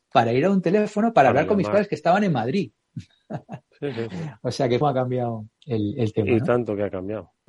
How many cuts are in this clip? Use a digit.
1